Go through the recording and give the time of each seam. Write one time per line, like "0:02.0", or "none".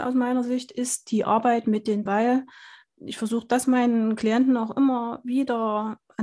0:02.1